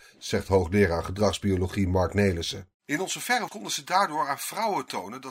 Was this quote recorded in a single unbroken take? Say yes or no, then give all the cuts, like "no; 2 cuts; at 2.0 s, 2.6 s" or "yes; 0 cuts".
no; 1 cut; at 3.5 s